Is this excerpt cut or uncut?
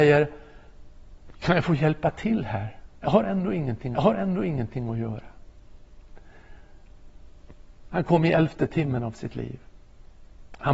cut